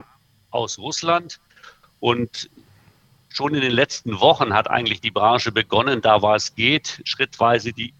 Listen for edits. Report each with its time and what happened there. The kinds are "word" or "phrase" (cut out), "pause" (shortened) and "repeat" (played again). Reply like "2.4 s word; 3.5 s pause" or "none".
none